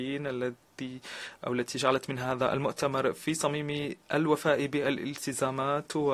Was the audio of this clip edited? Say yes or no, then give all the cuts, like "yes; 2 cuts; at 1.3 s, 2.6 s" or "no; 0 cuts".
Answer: yes; 1 cut; at 4.0 s